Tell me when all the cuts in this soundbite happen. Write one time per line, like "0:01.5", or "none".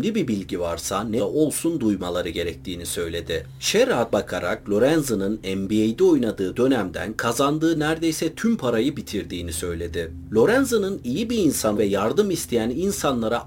0:01.2
0:04.1
0:11.8